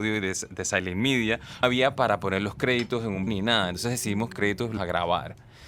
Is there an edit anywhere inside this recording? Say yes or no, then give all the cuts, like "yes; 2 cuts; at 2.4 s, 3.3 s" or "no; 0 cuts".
yes; 4 cuts; at 1.6 s, 3.3 s, 4.3 s, 4.8 s